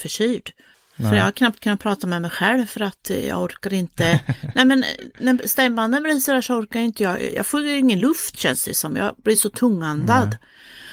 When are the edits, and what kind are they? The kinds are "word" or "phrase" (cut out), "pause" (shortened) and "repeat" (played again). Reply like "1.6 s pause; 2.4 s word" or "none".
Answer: none

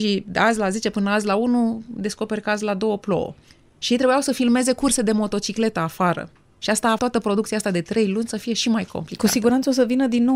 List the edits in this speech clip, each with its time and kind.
3.5 s pause; 6.4 s pause; 7.0 s word

